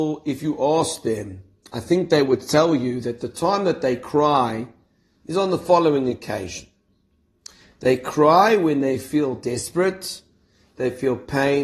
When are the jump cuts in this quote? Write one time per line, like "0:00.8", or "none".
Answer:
none